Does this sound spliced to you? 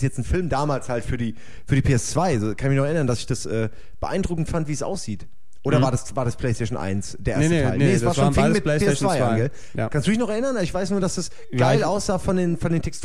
no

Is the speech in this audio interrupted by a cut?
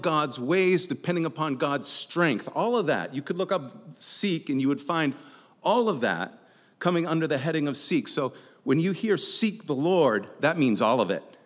no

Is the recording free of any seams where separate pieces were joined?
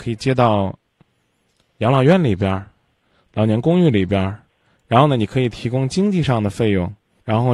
yes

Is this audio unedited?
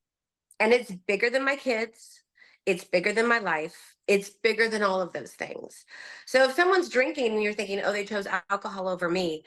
yes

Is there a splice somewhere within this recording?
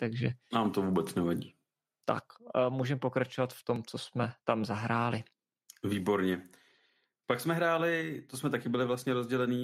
no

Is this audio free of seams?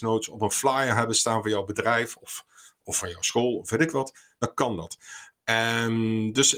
yes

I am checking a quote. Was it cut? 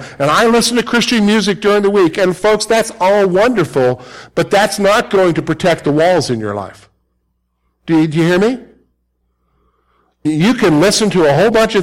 yes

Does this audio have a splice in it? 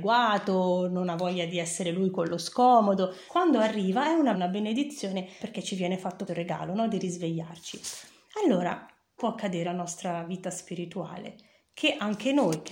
yes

